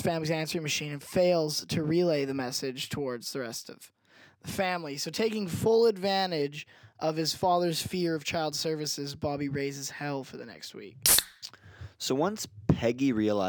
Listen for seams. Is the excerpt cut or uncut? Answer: uncut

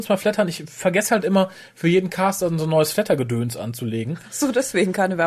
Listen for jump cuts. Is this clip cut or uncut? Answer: uncut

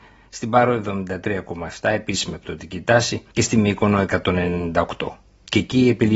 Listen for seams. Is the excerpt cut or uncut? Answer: cut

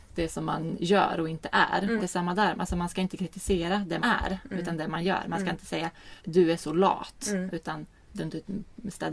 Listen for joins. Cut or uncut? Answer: cut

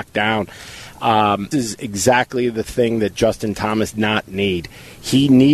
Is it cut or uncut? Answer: cut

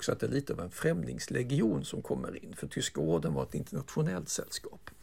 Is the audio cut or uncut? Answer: uncut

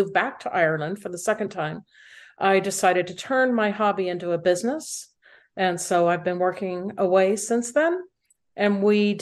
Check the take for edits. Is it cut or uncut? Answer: uncut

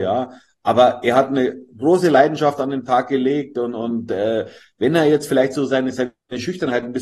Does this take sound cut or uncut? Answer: uncut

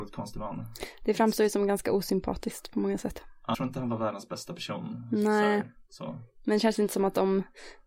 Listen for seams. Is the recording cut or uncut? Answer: cut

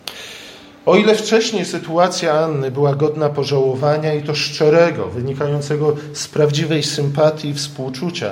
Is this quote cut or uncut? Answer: uncut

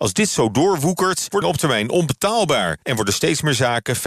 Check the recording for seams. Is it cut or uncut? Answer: cut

